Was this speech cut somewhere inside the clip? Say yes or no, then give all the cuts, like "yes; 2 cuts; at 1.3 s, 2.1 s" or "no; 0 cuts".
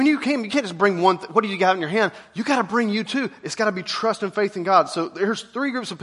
no; 0 cuts